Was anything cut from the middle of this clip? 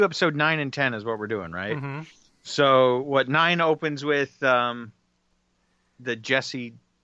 no; 0 cuts

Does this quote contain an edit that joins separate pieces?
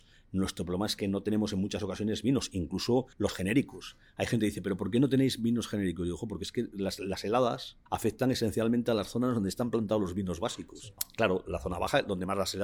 yes; 2 cuts; at 3.1 s, 7.9 s

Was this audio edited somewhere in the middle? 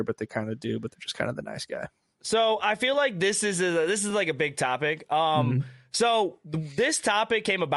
no; 0 cuts

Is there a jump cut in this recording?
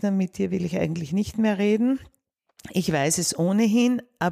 no; 0 cuts

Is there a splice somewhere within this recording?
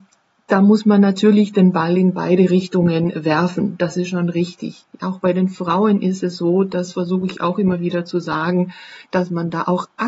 no; 0 cuts

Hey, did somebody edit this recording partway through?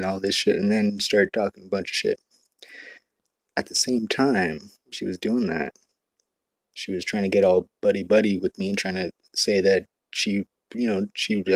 no; 0 cuts

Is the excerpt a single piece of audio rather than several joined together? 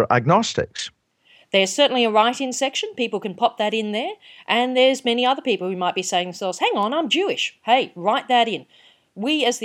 yes; 0 cuts

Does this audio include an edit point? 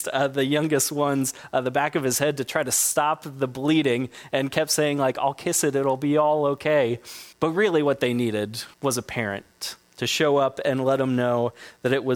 yes; 3 cuts; at 7.3 s, 8.7 s, 9.8 s

